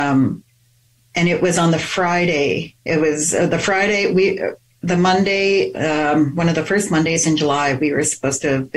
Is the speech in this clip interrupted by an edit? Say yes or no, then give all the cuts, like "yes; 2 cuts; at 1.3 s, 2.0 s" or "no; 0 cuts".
no; 0 cuts